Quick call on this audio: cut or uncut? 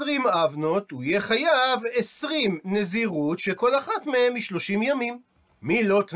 uncut